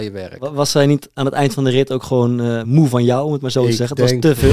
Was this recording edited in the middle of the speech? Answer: yes; 1 cut; at 2.6 s

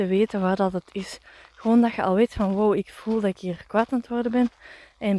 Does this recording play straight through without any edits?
yes; 0 cuts

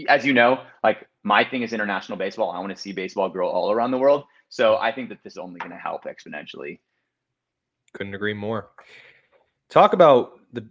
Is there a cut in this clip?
yes; 1 cut; at 5.3 s

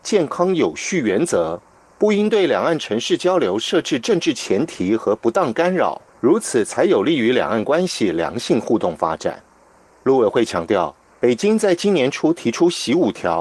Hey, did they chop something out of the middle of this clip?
yes; 1 cut; at 6.1 s

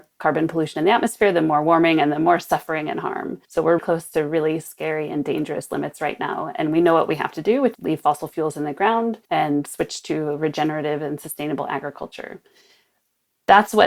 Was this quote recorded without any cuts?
no; 4 cuts; at 3.4 s, 3.8 s, 7.7 s, 9.2 s

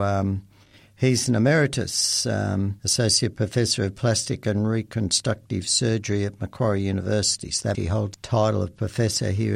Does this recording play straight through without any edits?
no; 3 cuts; at 2.8 s, 7.7 s, 8.1 s

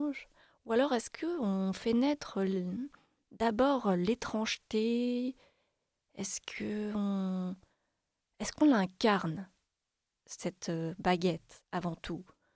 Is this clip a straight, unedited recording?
yes; 0 cuts

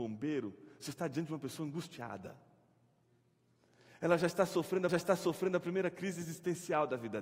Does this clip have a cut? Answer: yes; 1 cut; at 4.9 s

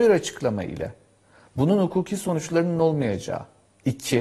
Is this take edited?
no; 0 cuts

